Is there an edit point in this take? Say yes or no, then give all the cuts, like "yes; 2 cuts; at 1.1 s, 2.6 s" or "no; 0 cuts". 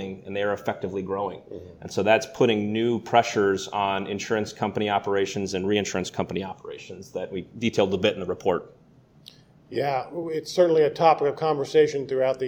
no; 0 cuts